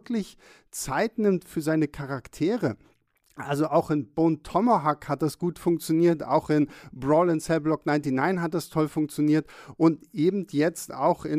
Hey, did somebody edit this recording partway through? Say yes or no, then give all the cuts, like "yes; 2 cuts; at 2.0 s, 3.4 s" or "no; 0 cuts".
no; 0 cuts